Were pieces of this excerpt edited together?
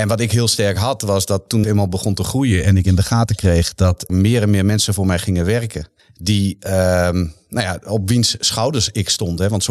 yes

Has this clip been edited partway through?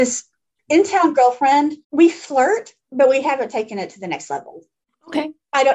yes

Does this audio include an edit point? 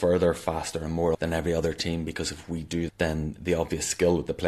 yes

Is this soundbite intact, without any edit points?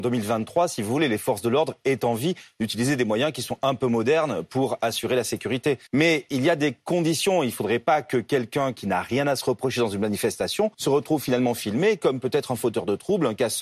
no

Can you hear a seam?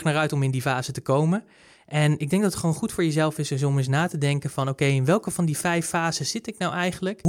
no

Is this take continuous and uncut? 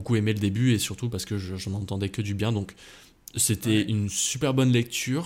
yes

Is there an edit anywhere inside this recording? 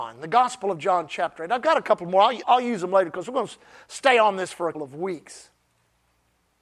yes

